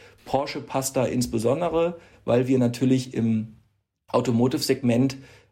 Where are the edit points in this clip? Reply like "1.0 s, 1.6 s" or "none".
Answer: none